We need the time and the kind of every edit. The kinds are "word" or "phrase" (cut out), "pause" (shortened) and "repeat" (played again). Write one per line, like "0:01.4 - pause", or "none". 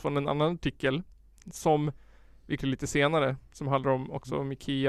0:02.6 - word